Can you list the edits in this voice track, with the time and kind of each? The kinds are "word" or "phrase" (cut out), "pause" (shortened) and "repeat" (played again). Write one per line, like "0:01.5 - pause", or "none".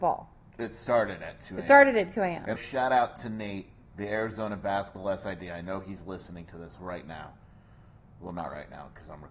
0:02.6 - word